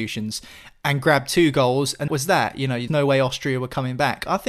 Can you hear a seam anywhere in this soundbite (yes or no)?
yes